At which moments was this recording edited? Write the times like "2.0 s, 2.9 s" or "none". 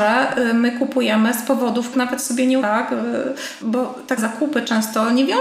1.9 s, 2.6 s, 4.2 s